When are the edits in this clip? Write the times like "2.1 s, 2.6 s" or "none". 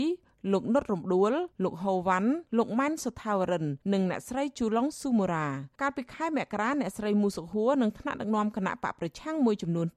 1.5 s, 2.5 s, 3.8 s, 5.7 s